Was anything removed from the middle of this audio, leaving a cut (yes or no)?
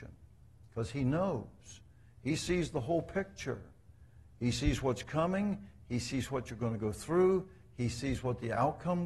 no